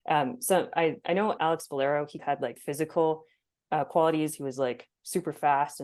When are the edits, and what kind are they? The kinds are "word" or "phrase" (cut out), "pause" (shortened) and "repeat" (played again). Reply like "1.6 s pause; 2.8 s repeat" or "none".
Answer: 1.4 s word; 2.2 s word; 2.6 s word